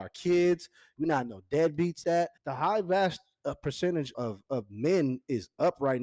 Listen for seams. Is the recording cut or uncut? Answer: cut